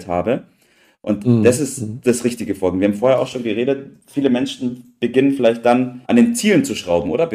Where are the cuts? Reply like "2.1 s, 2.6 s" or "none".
4.0 s, 6.0 s

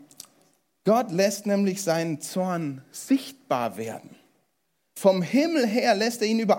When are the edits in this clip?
none

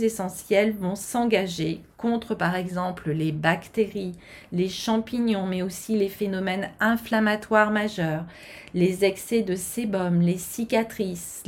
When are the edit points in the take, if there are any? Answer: none

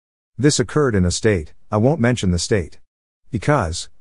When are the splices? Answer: 1.1 s

